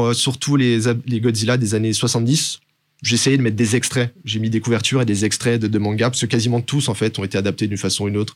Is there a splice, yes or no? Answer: no